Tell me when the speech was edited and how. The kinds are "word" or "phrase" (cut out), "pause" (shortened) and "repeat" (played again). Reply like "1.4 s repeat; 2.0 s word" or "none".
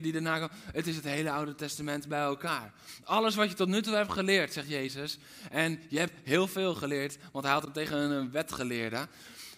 none